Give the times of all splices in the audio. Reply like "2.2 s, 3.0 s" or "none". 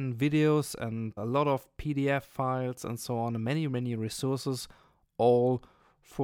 1.2 s